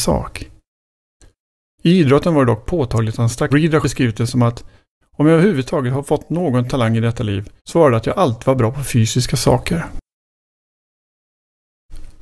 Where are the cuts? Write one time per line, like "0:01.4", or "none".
0:03.5
0:03.8
0:07.6